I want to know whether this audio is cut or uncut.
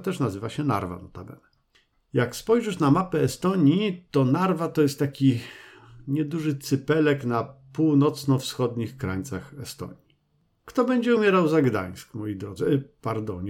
uncut